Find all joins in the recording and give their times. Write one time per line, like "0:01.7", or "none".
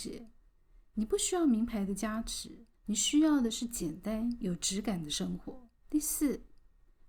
0:02.7
0:05.8